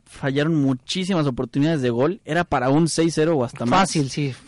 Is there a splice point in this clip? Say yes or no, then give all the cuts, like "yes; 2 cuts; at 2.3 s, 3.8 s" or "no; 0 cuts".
no; 0 cuts